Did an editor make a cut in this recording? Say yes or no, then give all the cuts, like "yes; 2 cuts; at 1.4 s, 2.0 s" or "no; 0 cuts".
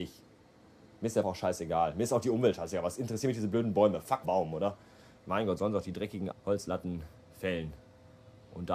yes; 3 cuts; at 1.2 s, 4.2 s, 6.3 s